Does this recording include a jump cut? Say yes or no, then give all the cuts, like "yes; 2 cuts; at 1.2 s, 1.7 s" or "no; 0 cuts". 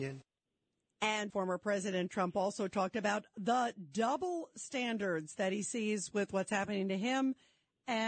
yes; 1 cut; at 1.3 s